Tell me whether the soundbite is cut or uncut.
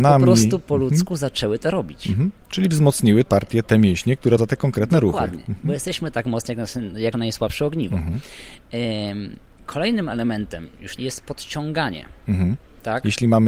cut